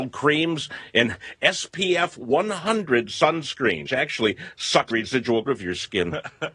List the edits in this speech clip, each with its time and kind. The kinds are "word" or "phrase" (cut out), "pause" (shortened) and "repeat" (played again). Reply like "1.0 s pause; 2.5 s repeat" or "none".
3.9 s word; 4.9 s word; 5.5 s phrase

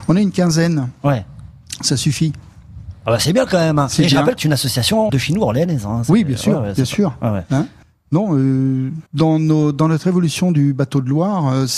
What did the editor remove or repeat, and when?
4.4 s word; 5.1 s word; 7.8 s pause; 9.1 s pause

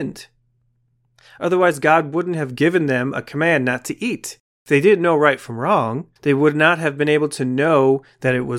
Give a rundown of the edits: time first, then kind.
4.4 s pause; 6.2 s pause

